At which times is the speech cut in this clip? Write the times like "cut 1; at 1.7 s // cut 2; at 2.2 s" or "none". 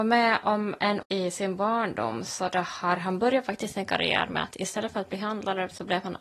cut 1; at 1.0 s